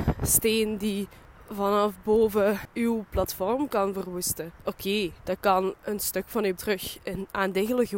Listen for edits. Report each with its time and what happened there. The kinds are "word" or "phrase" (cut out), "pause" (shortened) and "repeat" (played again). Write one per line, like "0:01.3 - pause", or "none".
0:06.6 - word